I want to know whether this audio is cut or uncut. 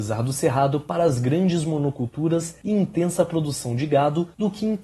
uncut